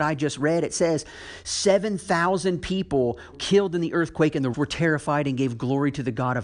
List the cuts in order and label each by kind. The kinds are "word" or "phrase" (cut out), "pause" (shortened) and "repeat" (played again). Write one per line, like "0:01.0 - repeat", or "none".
0:03.3 - word
0:04.5 - word